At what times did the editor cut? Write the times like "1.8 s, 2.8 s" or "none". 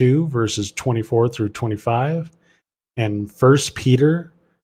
none